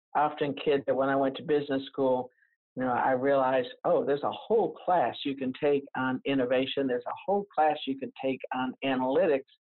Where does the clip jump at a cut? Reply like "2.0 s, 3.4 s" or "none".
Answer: none